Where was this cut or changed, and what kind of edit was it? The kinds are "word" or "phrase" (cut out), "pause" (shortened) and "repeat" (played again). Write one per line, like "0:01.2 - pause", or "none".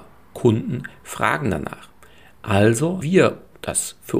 0:03.0 - word